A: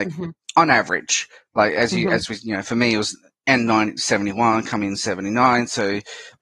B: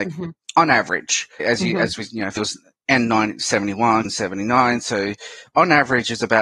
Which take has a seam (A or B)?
B